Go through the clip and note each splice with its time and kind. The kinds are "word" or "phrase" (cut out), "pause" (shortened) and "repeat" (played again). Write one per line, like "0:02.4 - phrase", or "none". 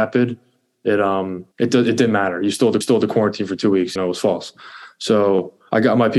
0:01.5 - pause
0:02.8 - repeat
0:04.0 - word